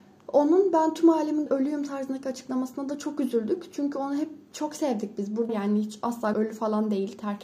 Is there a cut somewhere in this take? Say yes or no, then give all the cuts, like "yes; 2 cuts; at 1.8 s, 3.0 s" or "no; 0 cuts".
yes; 3 cuts; at 1.5 s, 5.5 s, 6.3 s